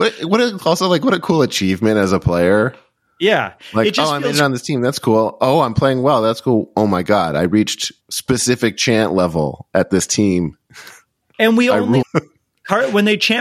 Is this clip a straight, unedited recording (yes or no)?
no